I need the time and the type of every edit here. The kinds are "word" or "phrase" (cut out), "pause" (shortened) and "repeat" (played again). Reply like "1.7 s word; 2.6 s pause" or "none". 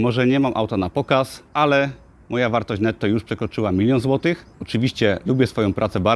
1.5 s pause; 4.5 s pause